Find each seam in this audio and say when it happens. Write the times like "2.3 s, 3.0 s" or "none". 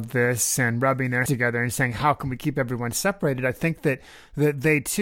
1.3 s